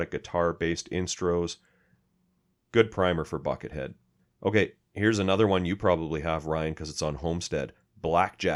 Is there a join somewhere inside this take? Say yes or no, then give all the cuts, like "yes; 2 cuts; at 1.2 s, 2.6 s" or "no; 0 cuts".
no; 0 cuts